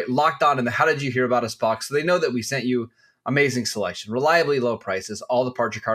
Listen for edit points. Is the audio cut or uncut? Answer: uncut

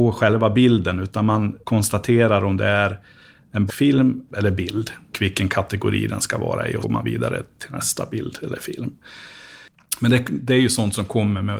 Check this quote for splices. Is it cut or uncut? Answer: cut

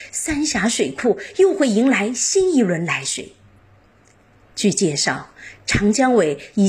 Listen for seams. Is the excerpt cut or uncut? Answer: uncut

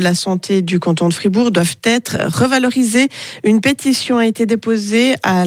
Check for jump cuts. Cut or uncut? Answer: uncut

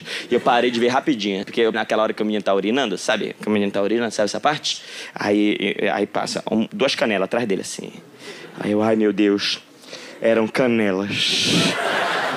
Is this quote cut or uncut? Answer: cut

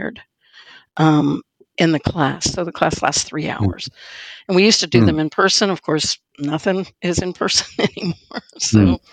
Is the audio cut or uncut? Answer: cut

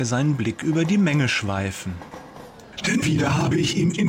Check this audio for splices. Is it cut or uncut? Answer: cut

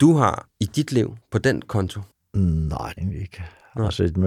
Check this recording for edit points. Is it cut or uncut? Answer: cut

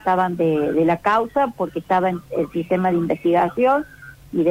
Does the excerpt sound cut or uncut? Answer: uncut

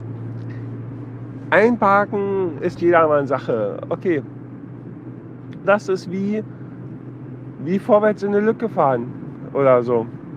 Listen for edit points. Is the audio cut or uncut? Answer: cut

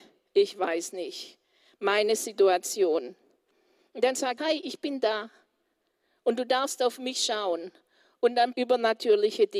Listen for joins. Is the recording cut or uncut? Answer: cut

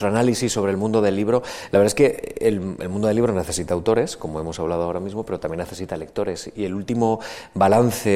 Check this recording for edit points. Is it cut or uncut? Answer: uncut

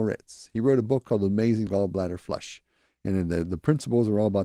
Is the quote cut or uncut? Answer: cut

